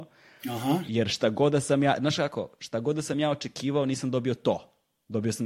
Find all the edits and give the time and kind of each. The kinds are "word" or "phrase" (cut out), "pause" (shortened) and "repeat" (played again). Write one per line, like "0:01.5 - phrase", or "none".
none